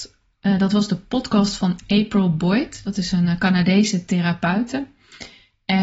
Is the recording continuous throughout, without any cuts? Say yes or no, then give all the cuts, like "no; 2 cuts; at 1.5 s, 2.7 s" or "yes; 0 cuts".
yes; 0 cuts